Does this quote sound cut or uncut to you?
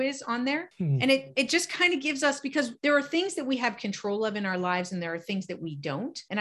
uncut